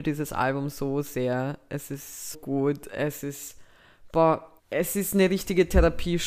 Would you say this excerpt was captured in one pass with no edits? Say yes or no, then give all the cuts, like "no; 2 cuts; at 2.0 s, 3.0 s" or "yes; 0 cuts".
no; 2 cuts; at 2.3 s, 4.6 s